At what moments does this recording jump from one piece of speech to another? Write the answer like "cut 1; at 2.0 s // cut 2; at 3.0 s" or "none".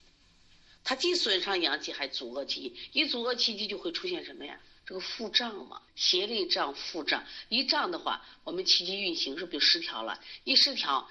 cut 1; at 5.9 s